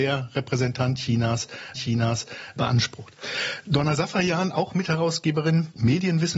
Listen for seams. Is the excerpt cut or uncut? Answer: cut